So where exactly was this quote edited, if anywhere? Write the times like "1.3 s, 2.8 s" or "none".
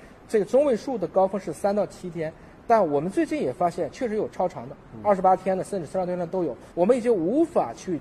6.7 s